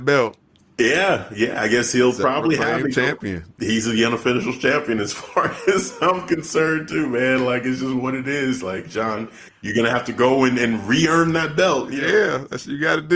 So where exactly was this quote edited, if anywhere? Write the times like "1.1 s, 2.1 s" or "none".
3.5 s